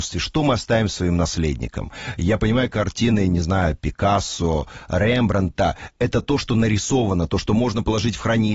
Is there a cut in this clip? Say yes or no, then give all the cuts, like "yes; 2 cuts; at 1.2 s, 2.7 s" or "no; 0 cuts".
no; 0 cuts